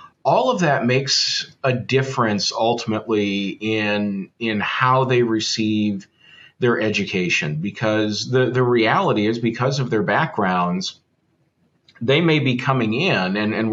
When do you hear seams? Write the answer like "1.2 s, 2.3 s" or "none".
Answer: none